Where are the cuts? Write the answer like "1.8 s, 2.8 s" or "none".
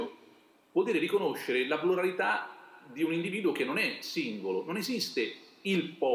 none